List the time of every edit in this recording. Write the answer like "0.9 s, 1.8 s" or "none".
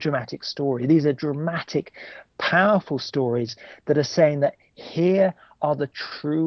none